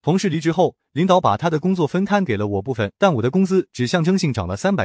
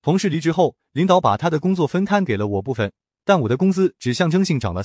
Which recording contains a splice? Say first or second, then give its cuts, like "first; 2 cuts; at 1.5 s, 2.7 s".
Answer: first; 1 cut; at 3.0 s